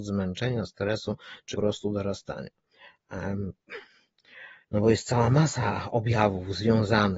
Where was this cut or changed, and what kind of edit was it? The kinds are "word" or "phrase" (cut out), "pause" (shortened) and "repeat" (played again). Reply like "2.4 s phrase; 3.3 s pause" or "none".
1.5 s word; 4.6 s pause